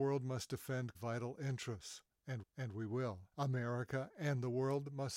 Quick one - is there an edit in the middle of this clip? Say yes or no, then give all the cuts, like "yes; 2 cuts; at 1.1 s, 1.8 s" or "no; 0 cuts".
yes; 3 cuts; at 0.9 s, 2.4 s, 3.3 s